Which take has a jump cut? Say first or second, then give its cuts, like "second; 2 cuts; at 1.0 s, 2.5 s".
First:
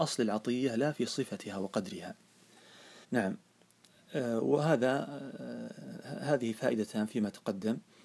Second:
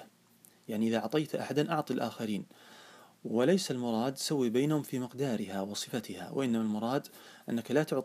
first; 1 cut; at 3.0 s